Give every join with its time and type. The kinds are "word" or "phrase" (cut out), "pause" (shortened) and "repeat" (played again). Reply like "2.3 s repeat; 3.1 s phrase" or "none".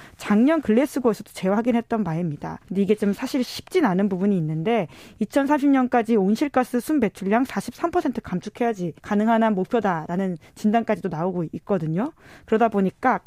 2.6 s pause; 9.0 s pause